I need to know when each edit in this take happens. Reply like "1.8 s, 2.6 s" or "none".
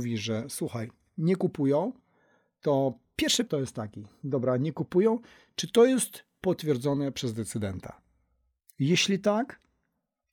3.5 s